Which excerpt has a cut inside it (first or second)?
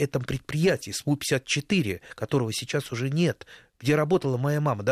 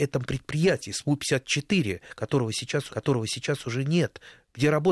second